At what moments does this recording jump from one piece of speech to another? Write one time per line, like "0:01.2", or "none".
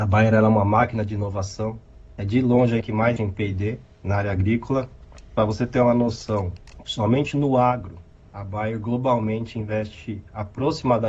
0:02.8
0:03.2